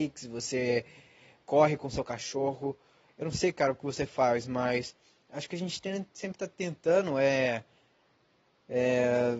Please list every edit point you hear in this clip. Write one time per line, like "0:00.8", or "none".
none